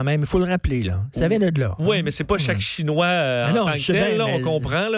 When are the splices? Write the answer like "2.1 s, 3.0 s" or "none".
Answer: none